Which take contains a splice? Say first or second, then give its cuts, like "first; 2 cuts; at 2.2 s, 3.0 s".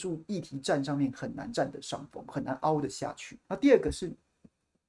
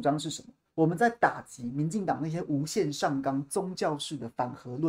first; 1 cut; at 3.4 s